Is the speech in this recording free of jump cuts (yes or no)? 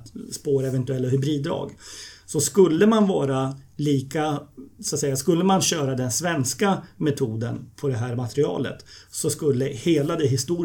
yes